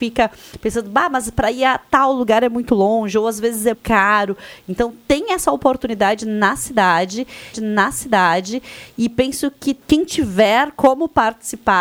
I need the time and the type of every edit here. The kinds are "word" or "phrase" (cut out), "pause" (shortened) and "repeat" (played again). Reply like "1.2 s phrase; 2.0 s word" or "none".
3.7 s word; 7.5 s repeat; 9.8 s pause